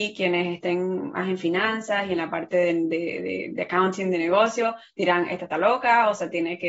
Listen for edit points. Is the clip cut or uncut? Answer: uncut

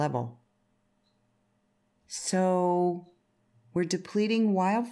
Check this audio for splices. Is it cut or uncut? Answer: uncut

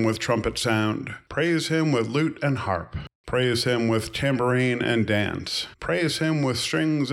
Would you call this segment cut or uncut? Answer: uncut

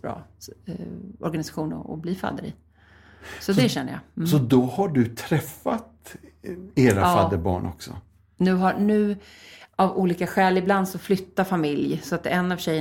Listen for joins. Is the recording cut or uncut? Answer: uncut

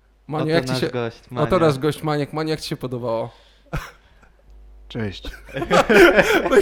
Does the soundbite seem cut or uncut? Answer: uncut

